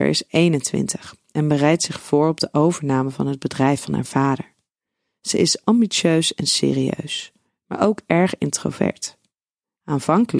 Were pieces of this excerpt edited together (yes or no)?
no